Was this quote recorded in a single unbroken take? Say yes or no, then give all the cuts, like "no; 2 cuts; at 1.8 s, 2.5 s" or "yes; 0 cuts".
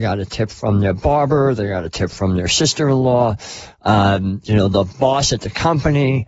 yes; 0 cuts